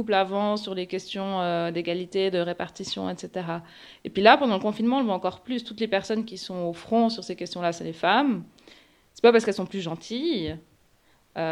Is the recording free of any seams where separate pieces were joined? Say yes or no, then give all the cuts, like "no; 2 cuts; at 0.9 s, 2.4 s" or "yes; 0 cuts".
yes; 0 cuts